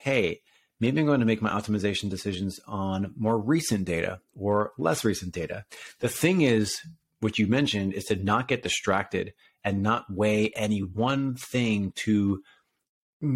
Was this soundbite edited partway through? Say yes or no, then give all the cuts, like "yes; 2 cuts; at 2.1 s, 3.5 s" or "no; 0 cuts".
no; 0 cuts